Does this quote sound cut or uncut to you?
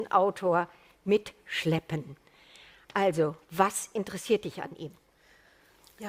uncut